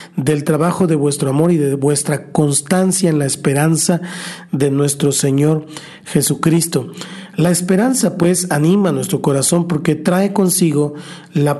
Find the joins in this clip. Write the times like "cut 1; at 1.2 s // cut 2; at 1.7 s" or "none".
none